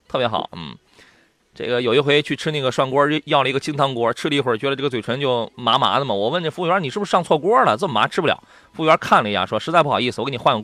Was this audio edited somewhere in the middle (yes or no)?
no